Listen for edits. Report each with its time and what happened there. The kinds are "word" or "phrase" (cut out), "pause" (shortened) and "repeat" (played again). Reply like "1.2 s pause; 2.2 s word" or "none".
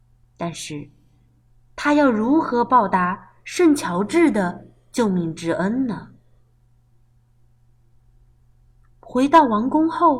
none